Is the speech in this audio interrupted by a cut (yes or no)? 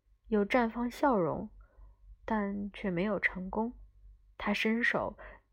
no